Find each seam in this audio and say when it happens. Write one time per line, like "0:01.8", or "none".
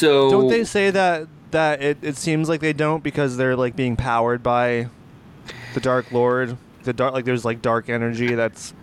0:06.8